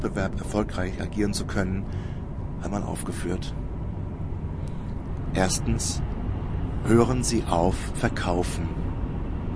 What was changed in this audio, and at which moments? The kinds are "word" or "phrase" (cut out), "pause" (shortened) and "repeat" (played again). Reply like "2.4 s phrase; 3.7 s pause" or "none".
2.6 s phrase; 7.9 s word